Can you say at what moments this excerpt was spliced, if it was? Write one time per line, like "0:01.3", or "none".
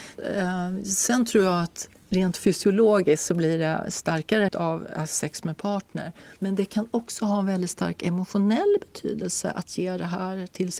0:04.5
0:06.4